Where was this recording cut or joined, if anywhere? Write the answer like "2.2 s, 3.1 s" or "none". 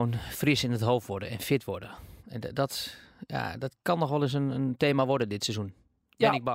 2.2 s, 3.8 s